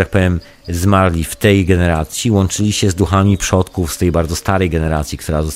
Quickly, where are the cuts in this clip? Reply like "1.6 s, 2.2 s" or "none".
none